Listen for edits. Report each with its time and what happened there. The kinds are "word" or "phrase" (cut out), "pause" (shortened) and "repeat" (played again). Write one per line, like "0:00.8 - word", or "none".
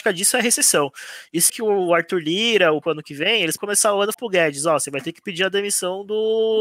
0:01.5 - word
0:02.8 - word
0:03.6 - word
0:04.1 - word